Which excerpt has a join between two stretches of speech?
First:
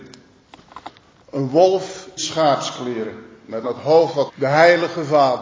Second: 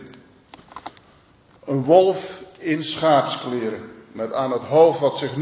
first; 4 cuts; at 1.1 s, 2.2 s, 3.6 s, 4.3 s

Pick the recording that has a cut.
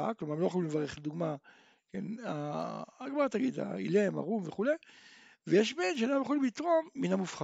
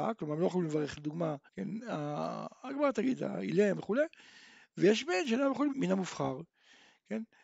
second; 3 cuts; at 1.5 s, 3.8 s, 5.7 s

